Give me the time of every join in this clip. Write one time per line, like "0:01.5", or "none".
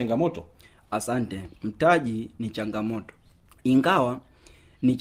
0:03.5

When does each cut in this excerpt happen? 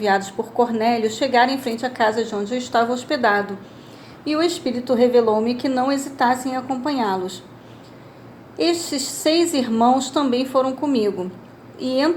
none

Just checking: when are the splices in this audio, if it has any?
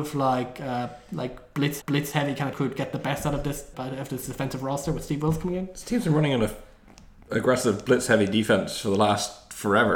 0:01.8
0:02.5
0:03.7

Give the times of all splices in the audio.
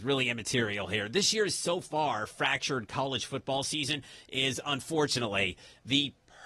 none

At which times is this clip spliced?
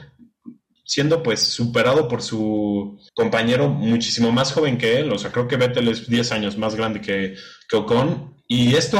0:03.1

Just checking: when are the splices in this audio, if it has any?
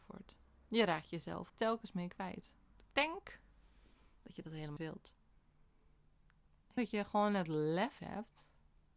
0:01.5
0:02.9
0:04.8
0:06.8
0:08.0

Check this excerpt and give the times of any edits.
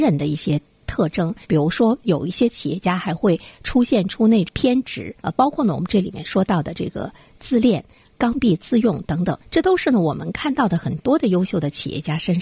0:01.4
0:05.2
0:09.4

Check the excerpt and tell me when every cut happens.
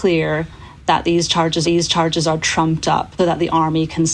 0:01.6
0:03.2

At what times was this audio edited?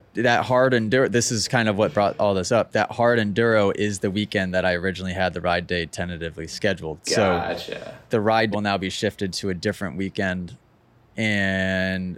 0:08.5

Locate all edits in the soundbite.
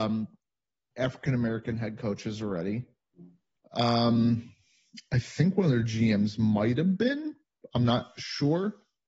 none

